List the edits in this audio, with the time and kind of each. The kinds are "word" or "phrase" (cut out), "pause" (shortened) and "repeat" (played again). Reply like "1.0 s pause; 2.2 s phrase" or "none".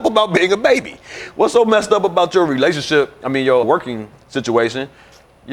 3.6 s word